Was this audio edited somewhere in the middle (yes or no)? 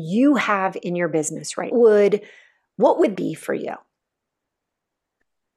yes